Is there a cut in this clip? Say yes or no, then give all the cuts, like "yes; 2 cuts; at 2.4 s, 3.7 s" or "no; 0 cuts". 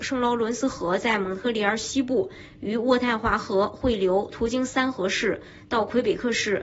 no; 0 cuts